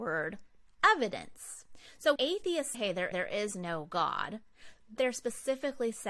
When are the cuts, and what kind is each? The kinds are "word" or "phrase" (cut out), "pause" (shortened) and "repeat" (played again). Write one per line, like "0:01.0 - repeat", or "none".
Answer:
0:02.2 - word
0:02.7 - word
0:03.1 - repeat
0:05.0 - word